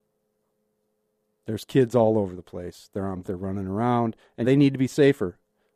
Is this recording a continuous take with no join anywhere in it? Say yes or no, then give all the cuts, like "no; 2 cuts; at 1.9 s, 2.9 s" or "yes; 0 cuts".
no; 2 cuts; at 3.2 s, 4.4 s